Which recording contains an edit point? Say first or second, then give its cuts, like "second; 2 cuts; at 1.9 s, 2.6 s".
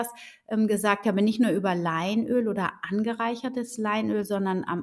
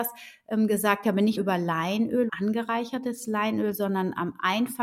second; 2 cuts; at 1.4 s, 2.3 s